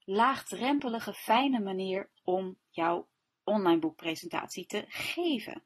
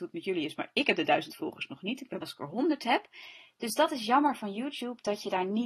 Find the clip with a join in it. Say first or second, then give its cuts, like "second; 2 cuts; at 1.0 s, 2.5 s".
second; 1 cut; at 2.2 s